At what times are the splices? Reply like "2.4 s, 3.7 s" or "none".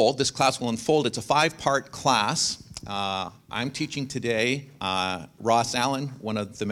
none